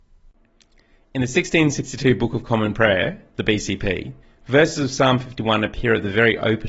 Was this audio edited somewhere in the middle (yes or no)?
yes